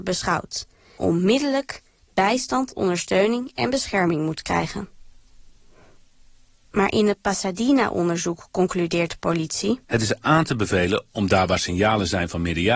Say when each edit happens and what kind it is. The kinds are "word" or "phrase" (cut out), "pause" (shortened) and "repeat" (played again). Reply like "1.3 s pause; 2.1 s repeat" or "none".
1.0 s word; 9.8 s pause